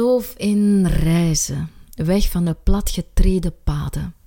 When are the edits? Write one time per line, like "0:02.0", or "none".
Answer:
none